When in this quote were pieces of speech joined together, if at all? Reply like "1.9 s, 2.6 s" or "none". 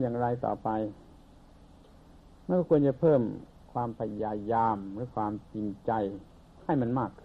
3.5 s